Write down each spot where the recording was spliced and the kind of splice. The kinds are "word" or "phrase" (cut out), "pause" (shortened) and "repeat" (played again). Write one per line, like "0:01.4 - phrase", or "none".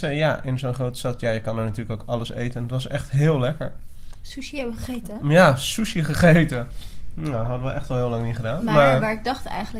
none